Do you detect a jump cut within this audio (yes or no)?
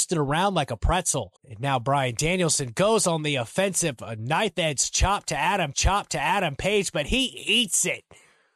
yes